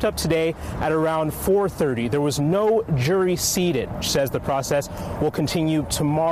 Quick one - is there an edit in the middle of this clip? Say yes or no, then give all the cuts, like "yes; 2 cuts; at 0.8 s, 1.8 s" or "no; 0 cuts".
yes; 1 cut; at 4.0 s